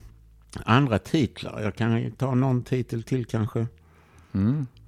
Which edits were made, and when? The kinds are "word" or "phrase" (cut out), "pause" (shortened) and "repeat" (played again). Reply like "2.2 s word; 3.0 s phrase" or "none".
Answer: none